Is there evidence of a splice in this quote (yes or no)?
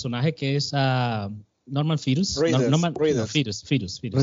no